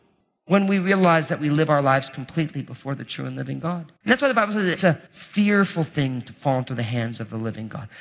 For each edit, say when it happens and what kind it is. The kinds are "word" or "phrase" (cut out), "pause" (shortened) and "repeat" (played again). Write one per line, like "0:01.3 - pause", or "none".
0:04.0 - pause
0:05.1 - pause